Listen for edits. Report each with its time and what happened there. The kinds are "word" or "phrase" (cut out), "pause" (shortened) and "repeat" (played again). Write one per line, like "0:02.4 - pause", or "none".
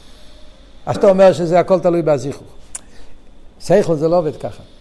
0:00.9 - word
0:03.5 - pause